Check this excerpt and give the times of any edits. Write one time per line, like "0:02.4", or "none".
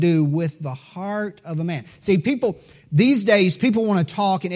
none